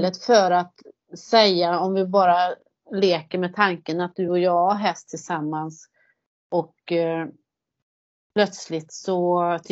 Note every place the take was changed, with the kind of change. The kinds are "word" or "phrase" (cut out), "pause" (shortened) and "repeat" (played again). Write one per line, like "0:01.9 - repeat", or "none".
none